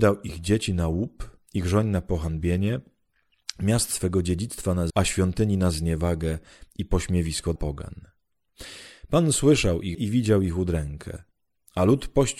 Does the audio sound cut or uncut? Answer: cut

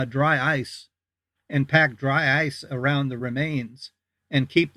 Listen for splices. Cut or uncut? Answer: uncut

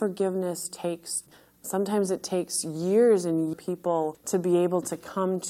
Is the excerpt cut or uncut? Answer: cut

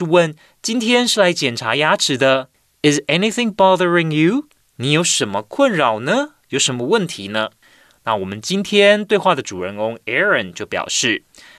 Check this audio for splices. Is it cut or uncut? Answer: uncut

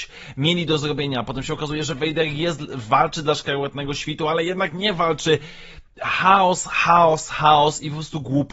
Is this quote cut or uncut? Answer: uncut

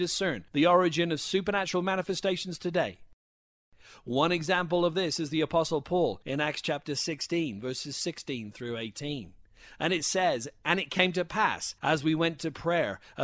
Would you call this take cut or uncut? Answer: uncut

